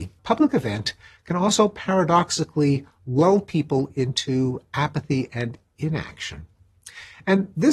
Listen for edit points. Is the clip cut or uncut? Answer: uncut